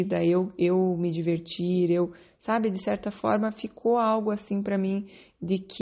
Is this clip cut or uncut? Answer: uncut